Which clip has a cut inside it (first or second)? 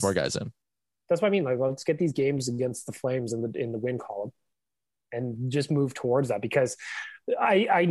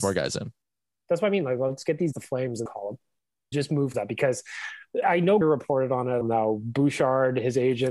second